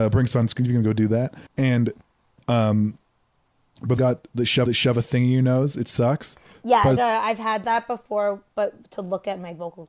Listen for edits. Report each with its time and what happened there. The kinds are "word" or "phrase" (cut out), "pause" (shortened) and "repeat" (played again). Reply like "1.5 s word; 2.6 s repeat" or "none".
1.5 s pause; 4.0 s word; 4.7 s repeat; 7.0 s phrase

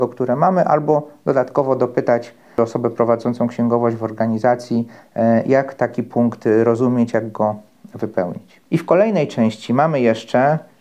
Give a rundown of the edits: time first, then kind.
8.7 s pause

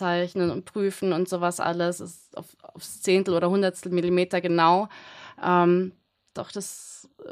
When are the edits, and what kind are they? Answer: none

